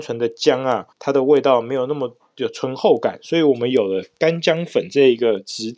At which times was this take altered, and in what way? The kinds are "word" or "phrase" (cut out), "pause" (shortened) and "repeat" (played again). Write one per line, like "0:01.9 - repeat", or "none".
0:00.9 - pause